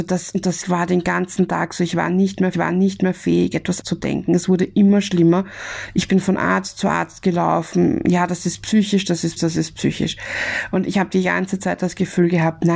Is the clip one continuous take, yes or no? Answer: no